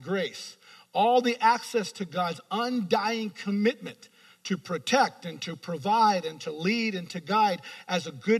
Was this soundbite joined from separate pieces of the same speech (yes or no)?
no